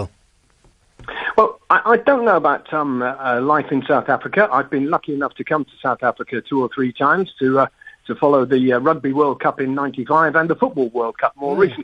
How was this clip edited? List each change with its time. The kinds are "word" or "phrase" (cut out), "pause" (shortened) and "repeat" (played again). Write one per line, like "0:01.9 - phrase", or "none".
none